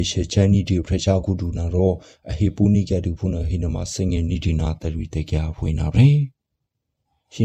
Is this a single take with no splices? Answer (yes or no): yes